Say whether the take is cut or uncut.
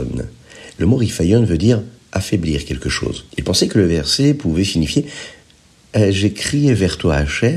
cut